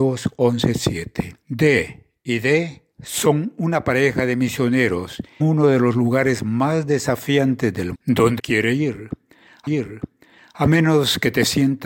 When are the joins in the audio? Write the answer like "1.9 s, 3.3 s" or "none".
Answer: 1.4 s, 2.9 s, 5.4 s, 7.9 s, 8.4 s, 9.7 s